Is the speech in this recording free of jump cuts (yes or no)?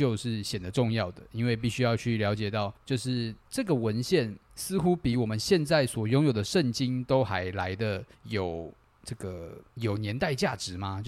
no